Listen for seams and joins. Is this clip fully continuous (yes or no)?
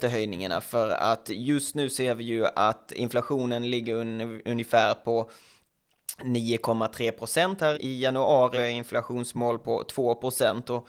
no